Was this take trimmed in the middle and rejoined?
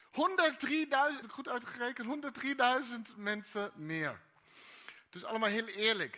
yes; 1 cut; at 1.2 s

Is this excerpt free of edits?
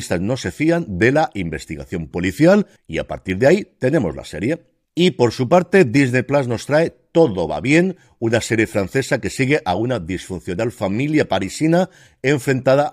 yes; 0 cuts

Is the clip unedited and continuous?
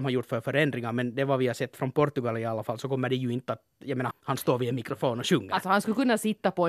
no; 1 cut; at 4.1 s

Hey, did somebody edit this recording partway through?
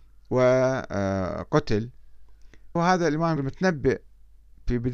yes; 2 cuts; at 2.8 s, 3.4 s

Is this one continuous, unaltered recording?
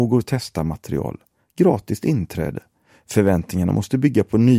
yes; 0 cuts

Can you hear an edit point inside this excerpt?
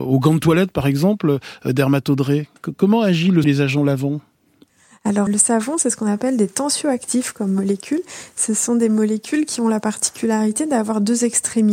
yes; 2 cuts; at 3.4 s, 5.3 s

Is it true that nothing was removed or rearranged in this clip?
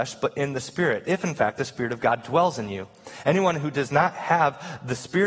yes; 0 cuts

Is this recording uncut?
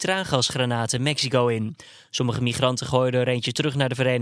yes; 0 cuts

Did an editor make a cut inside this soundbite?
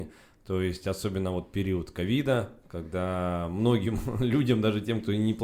no; 0 cuts

